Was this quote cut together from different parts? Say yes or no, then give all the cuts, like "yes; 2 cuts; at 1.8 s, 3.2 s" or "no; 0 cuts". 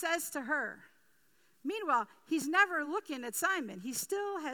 no; 0 cuts